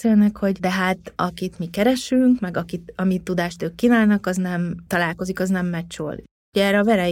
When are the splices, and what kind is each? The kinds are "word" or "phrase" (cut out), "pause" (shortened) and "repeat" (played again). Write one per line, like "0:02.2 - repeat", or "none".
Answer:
none